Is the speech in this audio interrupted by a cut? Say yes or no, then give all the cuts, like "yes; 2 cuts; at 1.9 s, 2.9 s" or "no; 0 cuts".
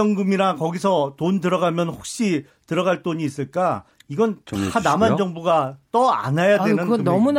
no; 0 cuts